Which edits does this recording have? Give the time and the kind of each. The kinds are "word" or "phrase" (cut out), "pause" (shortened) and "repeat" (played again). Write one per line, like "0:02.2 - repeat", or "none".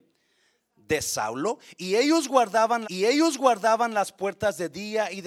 0:02.8 - repeat